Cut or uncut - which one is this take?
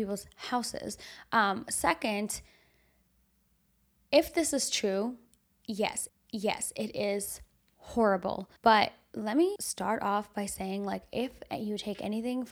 cut